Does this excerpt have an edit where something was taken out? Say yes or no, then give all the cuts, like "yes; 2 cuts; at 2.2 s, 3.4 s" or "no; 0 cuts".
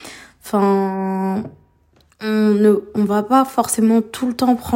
no; 0 cuts